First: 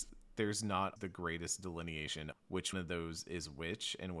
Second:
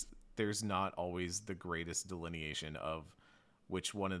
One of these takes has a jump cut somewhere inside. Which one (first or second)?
first